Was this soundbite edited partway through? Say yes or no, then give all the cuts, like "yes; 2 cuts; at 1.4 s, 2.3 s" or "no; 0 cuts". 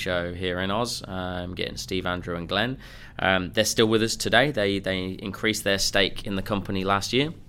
no; 0 cuts